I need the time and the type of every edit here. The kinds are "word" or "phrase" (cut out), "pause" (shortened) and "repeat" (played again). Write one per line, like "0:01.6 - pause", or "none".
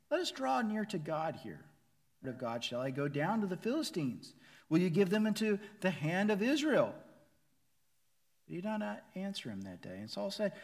0:02.2 - phrase